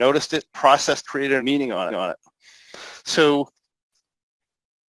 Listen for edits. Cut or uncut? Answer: cut